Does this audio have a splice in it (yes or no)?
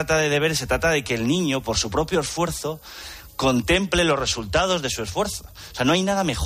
no